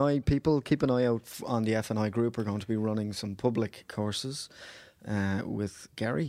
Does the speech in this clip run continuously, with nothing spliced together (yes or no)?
yes